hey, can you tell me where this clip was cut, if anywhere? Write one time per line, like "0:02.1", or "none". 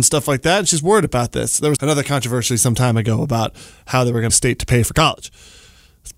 0:01.8
0:04.3